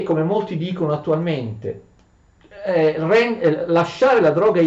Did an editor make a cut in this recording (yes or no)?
no